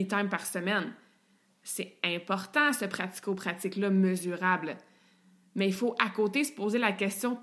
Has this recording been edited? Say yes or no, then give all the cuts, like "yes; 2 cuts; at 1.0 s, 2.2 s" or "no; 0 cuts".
no; 0 cuts